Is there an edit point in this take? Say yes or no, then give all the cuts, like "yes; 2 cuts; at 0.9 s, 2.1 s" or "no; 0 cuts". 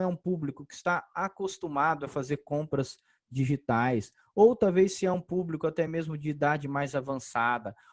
no; 0 cuts